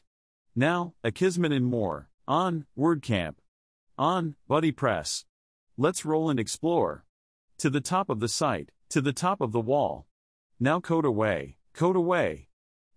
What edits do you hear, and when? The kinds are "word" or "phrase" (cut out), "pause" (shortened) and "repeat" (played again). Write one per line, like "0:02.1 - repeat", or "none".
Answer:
0:02.2 - pause
0:08.8 - pause
0:11.6 - pause

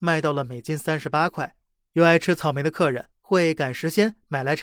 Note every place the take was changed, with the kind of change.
0:01.6 - pause

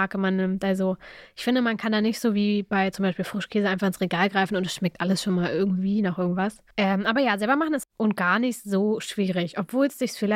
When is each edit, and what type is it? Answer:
0:06.7 - pause
0:07.8 - phrase

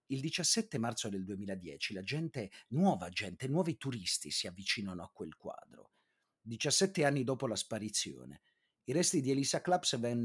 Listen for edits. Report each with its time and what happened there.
none

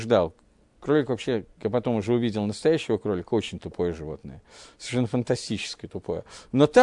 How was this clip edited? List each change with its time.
none

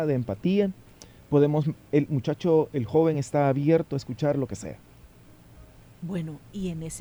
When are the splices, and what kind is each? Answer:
none

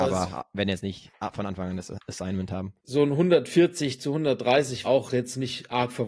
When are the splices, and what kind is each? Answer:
0:02.8 - pause
0:04.8 - word

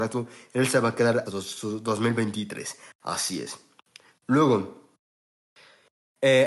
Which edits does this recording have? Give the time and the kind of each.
0:01.3 - word

